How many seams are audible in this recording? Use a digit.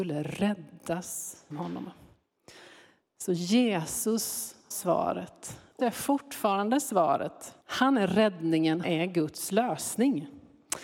5